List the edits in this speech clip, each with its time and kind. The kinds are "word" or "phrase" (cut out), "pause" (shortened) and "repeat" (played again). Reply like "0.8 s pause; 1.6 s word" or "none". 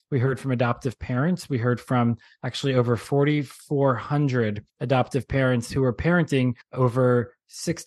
4.7 s pause; 6.6 s pause